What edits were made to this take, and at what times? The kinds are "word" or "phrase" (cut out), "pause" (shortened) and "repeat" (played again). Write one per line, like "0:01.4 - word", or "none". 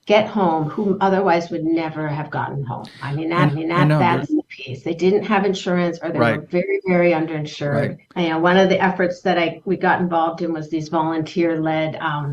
0:03.5 - repeat
0:08.0 - pause